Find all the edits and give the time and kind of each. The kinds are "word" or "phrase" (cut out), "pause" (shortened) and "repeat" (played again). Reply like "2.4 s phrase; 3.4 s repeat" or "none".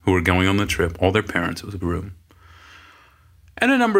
1.8 s word